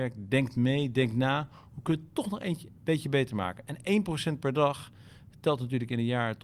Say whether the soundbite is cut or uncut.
uncut